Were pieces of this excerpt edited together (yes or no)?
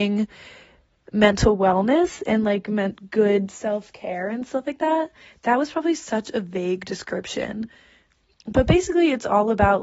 no